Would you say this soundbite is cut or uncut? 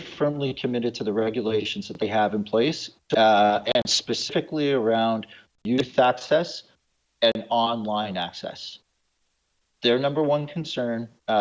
uncut